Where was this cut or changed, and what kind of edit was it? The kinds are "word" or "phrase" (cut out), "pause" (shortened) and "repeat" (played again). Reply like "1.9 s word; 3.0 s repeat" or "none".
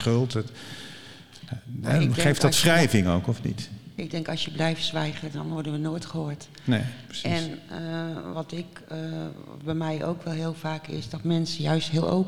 none